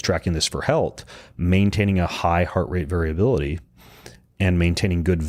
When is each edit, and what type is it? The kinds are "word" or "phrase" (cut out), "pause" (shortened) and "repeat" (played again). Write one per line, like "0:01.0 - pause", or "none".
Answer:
none